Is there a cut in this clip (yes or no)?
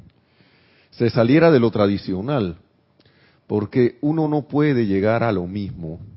no